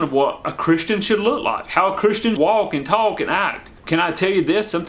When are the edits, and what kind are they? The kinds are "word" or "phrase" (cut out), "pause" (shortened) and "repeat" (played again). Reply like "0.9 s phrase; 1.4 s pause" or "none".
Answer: 2.4 s word; 3.8 s pause